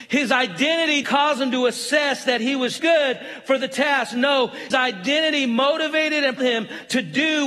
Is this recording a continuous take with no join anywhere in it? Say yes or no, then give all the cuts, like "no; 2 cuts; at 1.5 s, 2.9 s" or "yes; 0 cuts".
no; 4 cuts; at 1.0 s, 2.8 s, 4.7 s, 6.4 s